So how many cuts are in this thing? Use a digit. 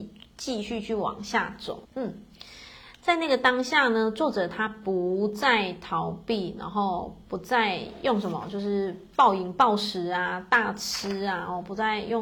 1